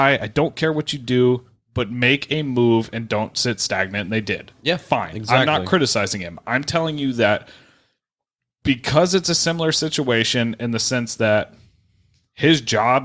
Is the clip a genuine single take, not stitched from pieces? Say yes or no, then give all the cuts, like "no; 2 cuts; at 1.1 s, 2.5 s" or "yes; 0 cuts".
yes; 0 cuts